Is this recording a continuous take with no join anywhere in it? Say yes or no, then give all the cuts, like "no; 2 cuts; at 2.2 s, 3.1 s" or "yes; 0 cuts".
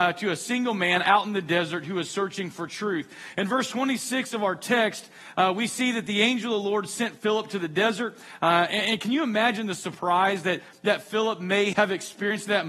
no; 1 cut; at 11.7 s